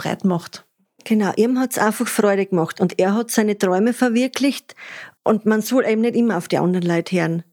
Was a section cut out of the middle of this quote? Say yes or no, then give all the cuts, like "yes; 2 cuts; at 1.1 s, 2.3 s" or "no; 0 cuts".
yes; 1 cut; at 5.2 s